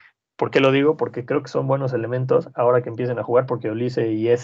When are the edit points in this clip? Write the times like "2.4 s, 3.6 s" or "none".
none